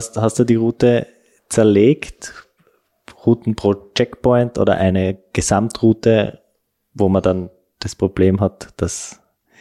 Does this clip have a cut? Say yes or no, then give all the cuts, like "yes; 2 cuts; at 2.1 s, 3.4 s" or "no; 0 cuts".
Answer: no; 0 cuts